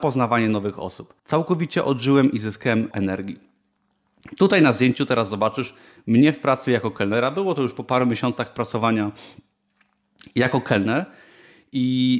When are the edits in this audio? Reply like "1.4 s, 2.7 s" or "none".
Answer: 1.2 s, 2.9 s